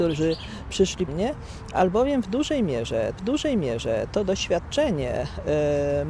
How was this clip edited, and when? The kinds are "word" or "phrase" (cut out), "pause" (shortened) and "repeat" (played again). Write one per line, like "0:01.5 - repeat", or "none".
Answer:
0:01.1 - word
0:03.2 - repeat